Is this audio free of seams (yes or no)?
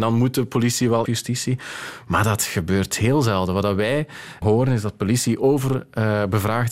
no